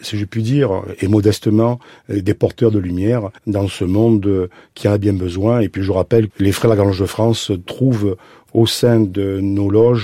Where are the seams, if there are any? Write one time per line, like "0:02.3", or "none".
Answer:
0:03.4
0:06.3